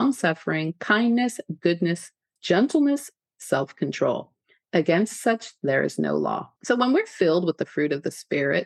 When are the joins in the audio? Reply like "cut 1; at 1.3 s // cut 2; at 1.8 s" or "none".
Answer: cut 1; at 2.4 s // cut 2; at 6.6 s

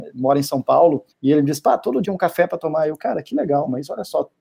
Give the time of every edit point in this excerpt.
cut 1; at 1.1 s // cut 2; at 2.0 s

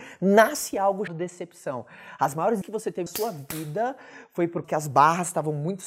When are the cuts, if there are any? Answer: cut 1; at 1.1 s // cut 2; at 2.6 s // cut 3; at 3.1 s // cut 4; at 4.6 s

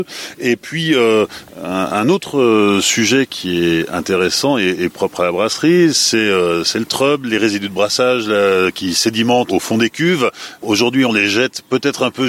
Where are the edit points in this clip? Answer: cut 1; at 9.5 s

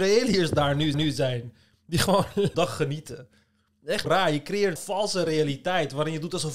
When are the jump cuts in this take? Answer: cut 1; at 0.9 s // cut 2; at 2.5 s // cut 3; at 4.0 s // cut 4; at 4.8 s

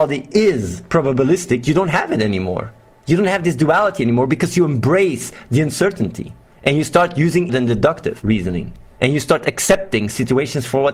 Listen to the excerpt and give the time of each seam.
cut 1; at 7.5 s

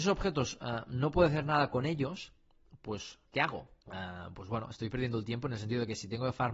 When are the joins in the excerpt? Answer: cut 1; at 3.8 s

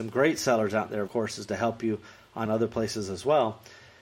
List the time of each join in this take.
cut 1; at 1.1 s // cut 2; at 2.5 s

